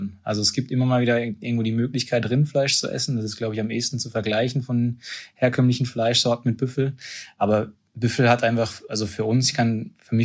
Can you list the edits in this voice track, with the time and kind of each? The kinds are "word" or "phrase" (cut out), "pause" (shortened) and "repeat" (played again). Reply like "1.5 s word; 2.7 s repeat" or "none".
none